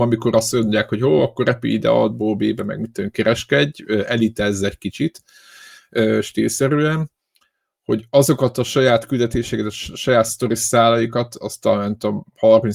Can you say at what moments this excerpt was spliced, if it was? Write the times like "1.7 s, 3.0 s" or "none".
none